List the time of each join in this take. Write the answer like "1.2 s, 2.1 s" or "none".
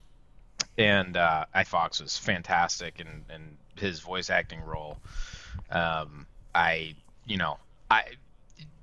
1.6 s, 3.6 s